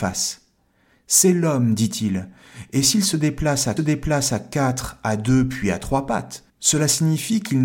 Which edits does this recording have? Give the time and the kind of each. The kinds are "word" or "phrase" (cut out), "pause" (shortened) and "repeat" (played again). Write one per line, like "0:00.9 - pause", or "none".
0:03.8 - repeat
0:06.5 - pause